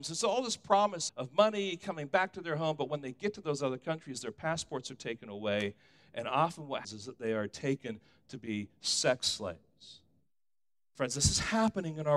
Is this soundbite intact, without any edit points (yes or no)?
no